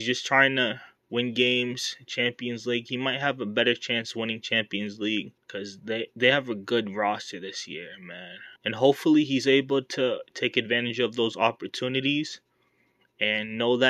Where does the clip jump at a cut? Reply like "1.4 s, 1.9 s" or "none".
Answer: 1.0 s, 5.4 s, 8.6 s